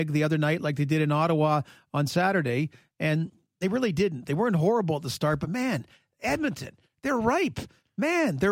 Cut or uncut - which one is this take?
uncut